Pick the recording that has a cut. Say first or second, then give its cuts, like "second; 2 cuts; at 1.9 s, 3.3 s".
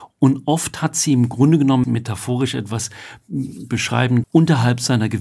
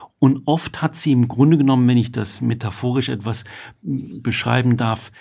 first; 2 cuts; at 1.8 s, 4.2 s